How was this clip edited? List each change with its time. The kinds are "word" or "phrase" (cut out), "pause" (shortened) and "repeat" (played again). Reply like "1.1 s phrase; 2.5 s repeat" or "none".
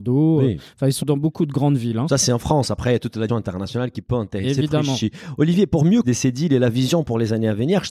1.0 s word; 3.3 s word; 6.0 s phrase

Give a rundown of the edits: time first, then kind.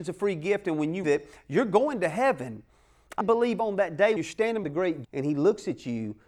1.0 s word; 3.2 s word; 4.2 s word; 4.6 s word; 5.0 s word

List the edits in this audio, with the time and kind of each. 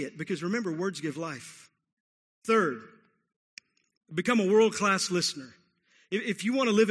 none

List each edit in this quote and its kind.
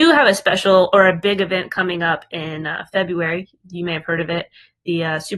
none

